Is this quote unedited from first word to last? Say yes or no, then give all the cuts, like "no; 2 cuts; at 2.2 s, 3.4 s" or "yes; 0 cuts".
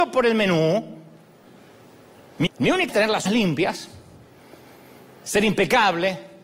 no; 3 cuts; at 2.5 s, 2.9 s, 3.3 s